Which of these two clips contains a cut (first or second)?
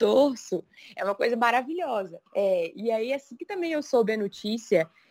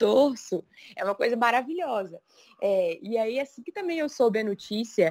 first